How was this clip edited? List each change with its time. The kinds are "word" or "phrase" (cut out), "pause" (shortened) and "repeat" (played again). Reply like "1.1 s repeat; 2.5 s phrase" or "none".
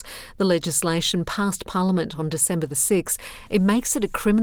none